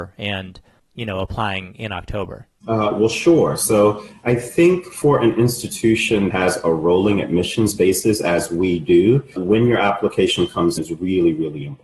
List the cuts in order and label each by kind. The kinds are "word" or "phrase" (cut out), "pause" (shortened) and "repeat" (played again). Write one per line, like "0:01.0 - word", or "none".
0:06.3 - word
0:09.4 - word
0:10.8 - word